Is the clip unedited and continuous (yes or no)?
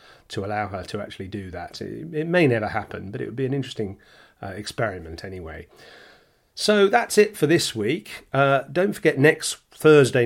yes